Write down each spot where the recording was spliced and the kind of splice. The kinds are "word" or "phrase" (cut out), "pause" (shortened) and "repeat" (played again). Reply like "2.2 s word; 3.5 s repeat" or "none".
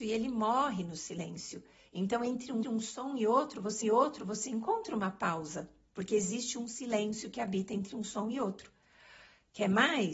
2.6 s repeat; 3.8 s repeat